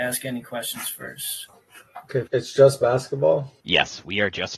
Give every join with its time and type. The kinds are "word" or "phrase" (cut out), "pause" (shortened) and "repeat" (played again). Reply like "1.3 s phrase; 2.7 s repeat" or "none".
2.3 s word; 3.6 s pause